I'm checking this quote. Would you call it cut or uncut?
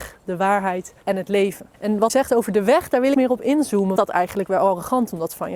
cut